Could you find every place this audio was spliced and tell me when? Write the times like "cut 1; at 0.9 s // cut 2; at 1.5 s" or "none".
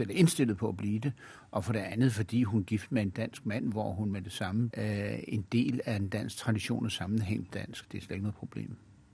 cut 1; at 4.7 s // cut 2; at 7.5 s